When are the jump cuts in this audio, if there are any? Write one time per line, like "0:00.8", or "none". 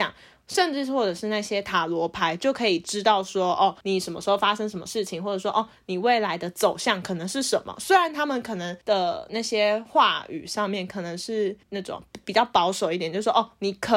0:03.8
0:08.8
0:11.6